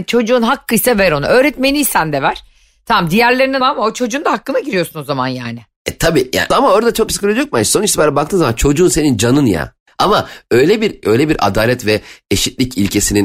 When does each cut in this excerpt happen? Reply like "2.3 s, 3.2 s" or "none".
3.6 s, 6.5 s, 7.1 s, 11.0 s